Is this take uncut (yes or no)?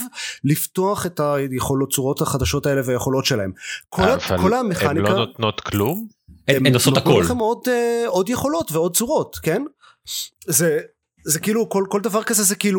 no